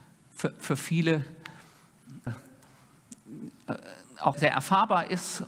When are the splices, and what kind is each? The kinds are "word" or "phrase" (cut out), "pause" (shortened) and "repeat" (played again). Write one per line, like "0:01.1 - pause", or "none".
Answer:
0:02.3 - word
0:04.3 - word